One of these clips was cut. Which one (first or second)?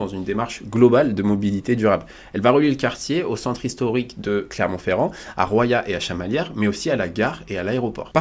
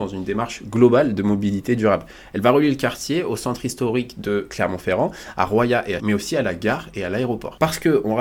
second